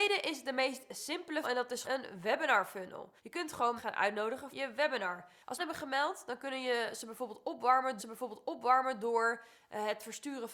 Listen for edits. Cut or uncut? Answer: cut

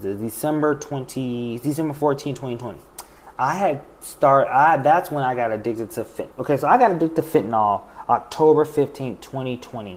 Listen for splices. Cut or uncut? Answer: cut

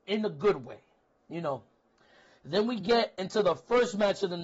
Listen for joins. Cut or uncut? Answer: uncut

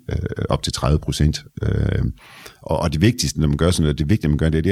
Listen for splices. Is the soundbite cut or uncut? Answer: uncut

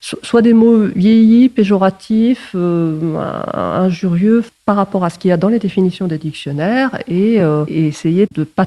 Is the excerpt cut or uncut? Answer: uncut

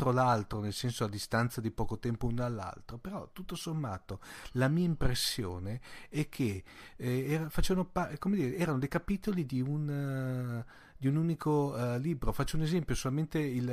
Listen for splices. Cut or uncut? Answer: uncut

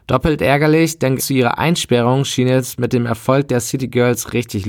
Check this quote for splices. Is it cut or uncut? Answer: cut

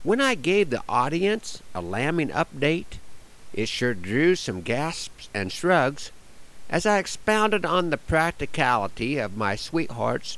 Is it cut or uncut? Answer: uncut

